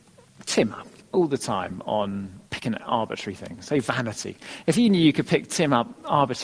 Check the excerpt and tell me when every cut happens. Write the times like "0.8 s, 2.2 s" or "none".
2.4 s